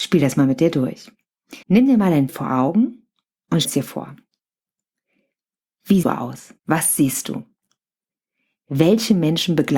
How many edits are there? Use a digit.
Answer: 5